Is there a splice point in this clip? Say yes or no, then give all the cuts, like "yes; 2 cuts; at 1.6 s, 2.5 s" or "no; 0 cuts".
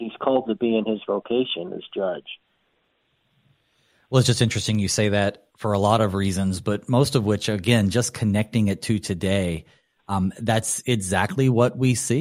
no; 0 cuts